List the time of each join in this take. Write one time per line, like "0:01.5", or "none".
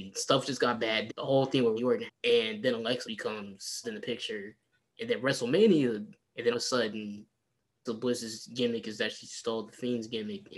0:01.1
0:01.8
0:02.1
0:03.0
0:03.8
0:06.2
0:06.5
0:07.9